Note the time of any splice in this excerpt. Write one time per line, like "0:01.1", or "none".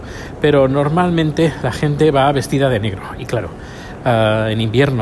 none